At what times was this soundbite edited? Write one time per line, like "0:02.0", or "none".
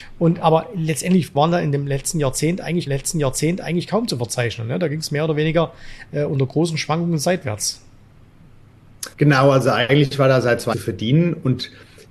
0:01.3
0:02.9
0:09.1
0:10.7

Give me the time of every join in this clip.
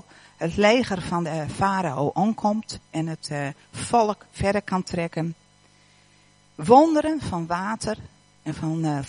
none

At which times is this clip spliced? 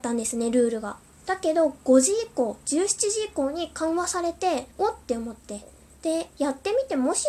0:01.1
0:04.7

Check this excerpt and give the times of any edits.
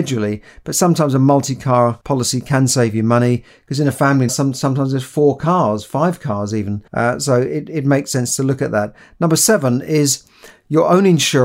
0:02.0
0:04.3
0:06.9

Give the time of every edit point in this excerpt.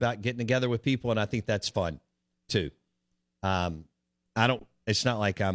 none

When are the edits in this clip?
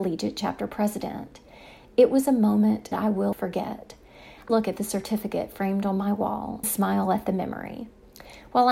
0:02.9
0:03.3
0:04.5
0:06.6

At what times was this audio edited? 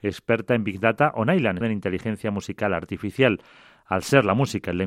0:01.6

